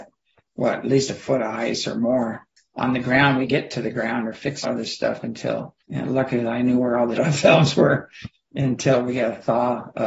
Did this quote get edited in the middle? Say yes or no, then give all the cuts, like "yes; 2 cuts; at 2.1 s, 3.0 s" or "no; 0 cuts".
yes; 5 cuts; at 2.6 s, 3.5 s, 4.6 s, 5.8 s, 7.2 s